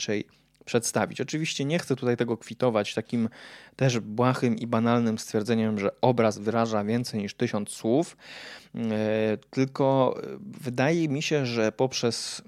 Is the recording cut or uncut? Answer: uncut